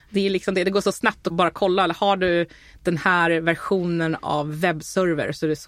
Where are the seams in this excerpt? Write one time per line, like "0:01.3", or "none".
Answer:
none